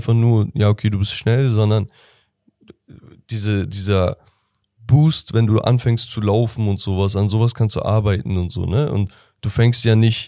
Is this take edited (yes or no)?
no